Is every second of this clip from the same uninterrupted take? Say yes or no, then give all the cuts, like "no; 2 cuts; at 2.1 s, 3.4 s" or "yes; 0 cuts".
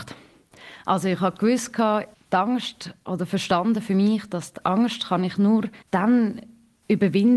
no; 2 cuts; at 2.1 s, 5.8 s